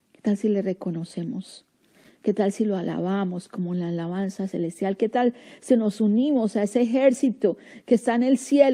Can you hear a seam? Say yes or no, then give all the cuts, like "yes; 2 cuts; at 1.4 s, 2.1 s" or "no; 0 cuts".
no; 0 cuts